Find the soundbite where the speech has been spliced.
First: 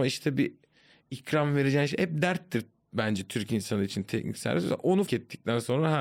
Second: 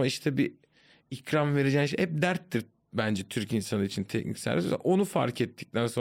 first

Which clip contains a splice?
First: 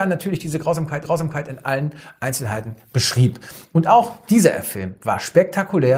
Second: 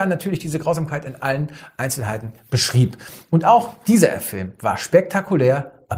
first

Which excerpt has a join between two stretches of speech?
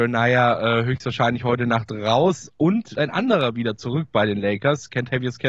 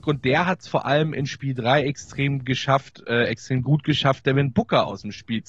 first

